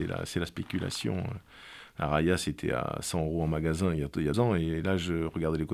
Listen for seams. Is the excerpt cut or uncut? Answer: cut